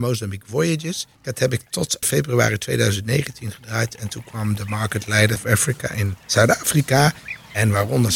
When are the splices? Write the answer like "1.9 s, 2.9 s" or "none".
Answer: 1.1 s, 2.0 s, 5.4 s, 6.2 s